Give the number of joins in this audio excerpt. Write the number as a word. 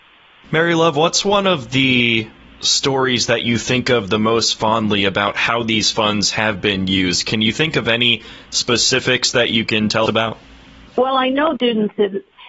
two